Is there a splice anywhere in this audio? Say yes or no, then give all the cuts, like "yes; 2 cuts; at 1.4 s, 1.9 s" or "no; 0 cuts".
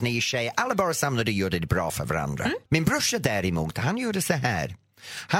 yes; 1 cut; at 2.7 s